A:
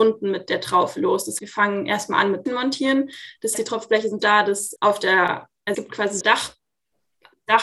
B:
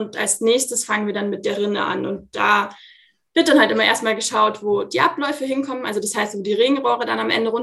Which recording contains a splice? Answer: A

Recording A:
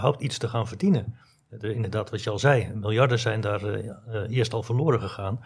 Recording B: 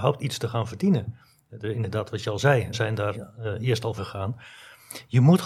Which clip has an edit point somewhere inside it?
B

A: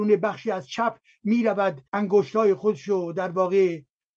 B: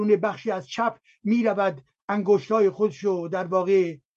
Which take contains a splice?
A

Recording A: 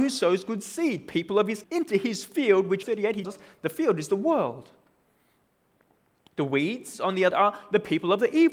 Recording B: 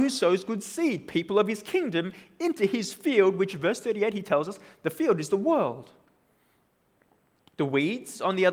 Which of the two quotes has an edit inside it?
A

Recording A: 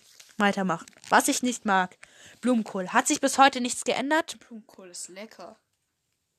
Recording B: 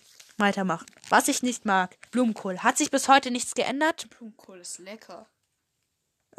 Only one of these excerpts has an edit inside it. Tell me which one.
B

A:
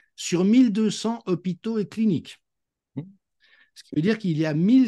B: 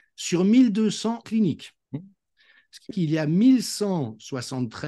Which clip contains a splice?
B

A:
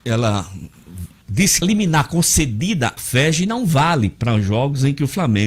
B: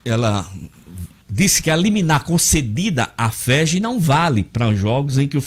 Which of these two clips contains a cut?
A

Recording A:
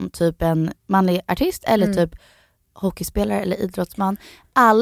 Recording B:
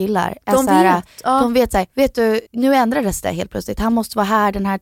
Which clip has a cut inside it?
B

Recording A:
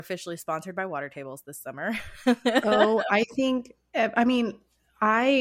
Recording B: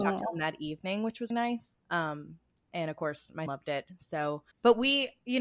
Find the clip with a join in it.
B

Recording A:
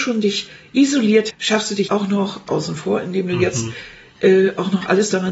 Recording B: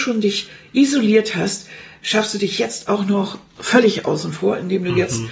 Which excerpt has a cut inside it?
A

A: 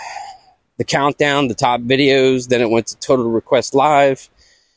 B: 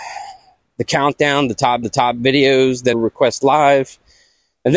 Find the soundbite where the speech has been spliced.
B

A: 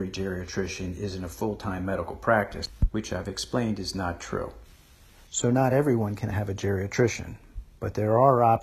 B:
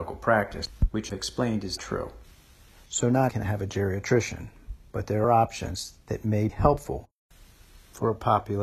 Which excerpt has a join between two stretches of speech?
B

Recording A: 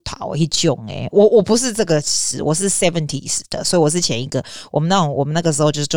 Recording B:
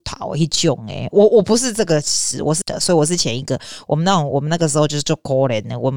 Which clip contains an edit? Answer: B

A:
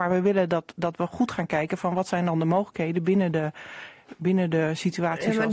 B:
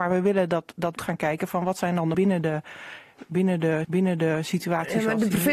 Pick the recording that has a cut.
B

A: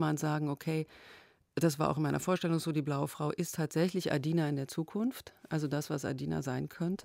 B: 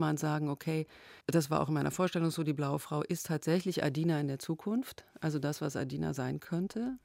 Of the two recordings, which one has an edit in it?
B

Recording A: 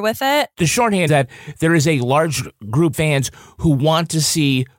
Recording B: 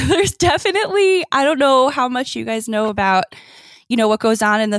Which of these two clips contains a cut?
A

